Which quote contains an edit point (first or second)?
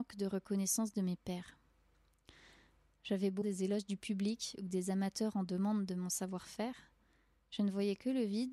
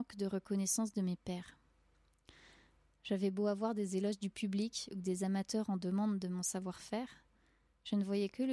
first